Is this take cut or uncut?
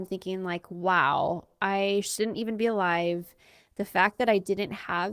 uncut